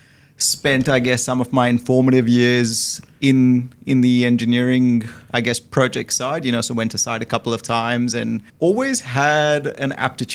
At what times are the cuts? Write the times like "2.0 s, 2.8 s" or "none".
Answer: 8.5 s